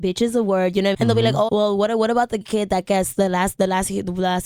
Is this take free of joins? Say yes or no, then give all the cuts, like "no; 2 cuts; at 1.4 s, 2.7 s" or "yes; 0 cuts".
no; 3 cuts; at 0.9 s, 1.5 s, 2.4 s